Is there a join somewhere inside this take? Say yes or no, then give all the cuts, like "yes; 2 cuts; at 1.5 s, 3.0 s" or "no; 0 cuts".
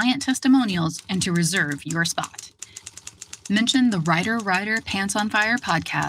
no; 0 cuts